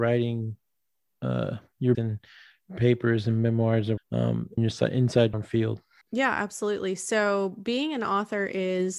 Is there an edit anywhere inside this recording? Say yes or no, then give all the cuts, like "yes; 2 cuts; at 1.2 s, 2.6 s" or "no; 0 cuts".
yes; 5 cuts; at 1.9 s, 4.0 s, 4.6 s, 5.3 s, 6.0 s